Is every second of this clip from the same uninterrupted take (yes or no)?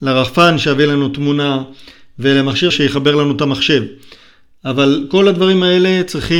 no